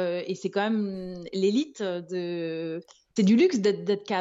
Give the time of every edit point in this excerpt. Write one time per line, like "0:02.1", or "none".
0:03.2